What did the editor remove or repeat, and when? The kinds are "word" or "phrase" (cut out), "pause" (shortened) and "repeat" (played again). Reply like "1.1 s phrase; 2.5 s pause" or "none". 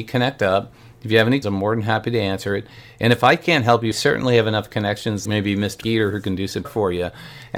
1.4 s word; 3.9 s word; 5.2 s word; 5.8 s word; 6.6 s word